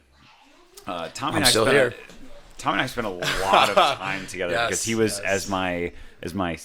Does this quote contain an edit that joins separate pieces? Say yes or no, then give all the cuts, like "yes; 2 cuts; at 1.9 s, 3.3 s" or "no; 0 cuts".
no; 0 cuts